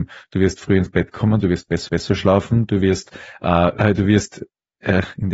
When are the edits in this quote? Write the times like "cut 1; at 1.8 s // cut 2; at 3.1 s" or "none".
cut 1; at 1.9 s // cut 2; at 3.8 s